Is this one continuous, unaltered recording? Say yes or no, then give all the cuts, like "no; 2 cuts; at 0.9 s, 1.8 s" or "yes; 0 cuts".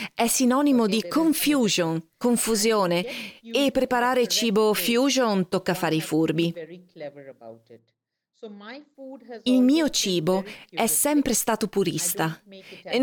no; 1 cut; at 3.7 s